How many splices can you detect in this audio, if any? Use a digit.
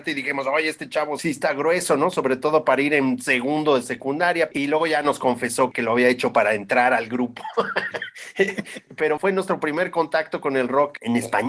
0